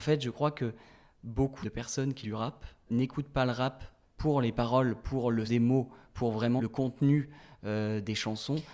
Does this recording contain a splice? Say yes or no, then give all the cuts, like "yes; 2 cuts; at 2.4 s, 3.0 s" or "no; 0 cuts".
yes; 6 cuts; at 1.6 s, 2.2 s, 2.9 s, 4.0 s, 5.4 s, 6.6 s